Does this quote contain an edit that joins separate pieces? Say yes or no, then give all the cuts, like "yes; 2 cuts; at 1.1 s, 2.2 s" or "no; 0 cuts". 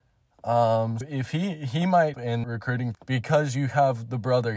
yes; 4 cuts; at 1.0 s, 2.1 s, 2.4 s, 2.9 s